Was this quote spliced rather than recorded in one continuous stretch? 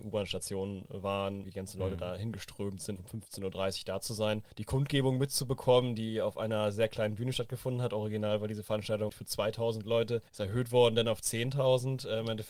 yes; 5 cuts; at 1.4 s, 3.0 s, 4.5 s, 9.1 s, 10.3 s

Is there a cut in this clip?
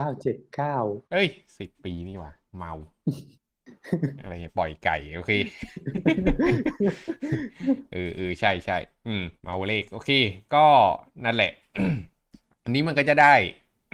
yes; 2 cuts; at 1.0 s, 9.4 s

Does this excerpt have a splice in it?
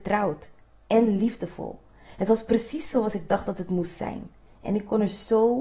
no; 0 cuts

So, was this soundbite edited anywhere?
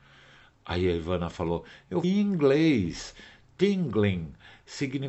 yes; 1 cut; at 2.0 s

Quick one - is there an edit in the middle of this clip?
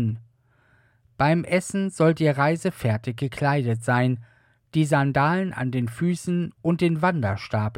no; 0 cuts

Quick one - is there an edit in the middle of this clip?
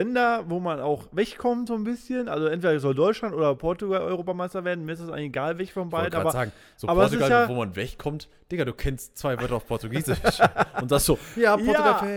no; 0 cuts

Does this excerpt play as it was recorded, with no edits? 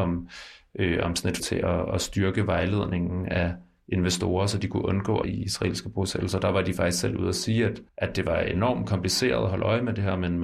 no; 3 cuts; at 1.4 s, 5.2 s, 7.9 s

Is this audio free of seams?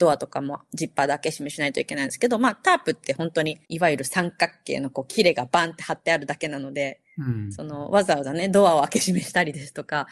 no; 1 cut; at 3.6 s

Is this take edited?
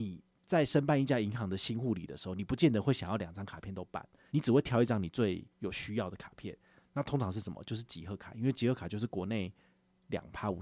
yes; 1 cut; at 5.5 s

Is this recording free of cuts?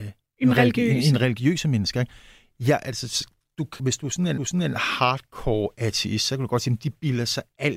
no; 2 cuts; at 3.8 s, 4.4 s

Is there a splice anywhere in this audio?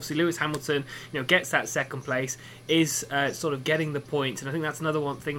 no; 0 cuts

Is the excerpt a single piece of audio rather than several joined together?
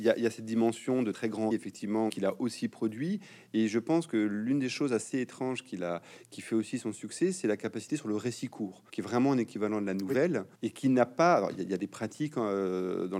no; 5 cuts; at 1.1 s, 1.5 s, 2.1 s, 8.9 s, 10.5 s

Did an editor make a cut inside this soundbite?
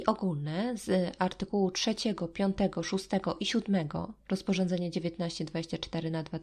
no; 0 cuts

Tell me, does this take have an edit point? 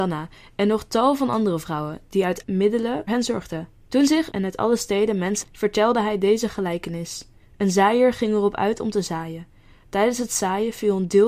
yes; 6 cuts; at 2.4 s, 3.1 s, 3.7 s, 4.3 s, 5.4 s, 7.4 s

